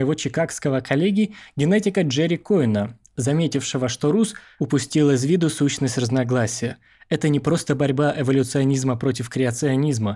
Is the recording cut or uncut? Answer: uncut